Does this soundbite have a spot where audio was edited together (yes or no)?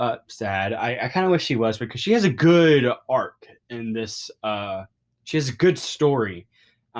no